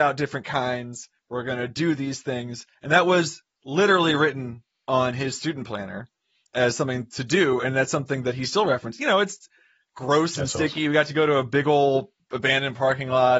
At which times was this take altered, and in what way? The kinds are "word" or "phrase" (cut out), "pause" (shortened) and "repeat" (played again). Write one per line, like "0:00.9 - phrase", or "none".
none